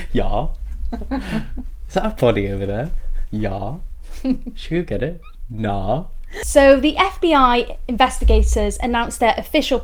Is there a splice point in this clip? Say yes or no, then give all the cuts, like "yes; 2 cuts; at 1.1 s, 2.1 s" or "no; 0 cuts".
no; 0 cuts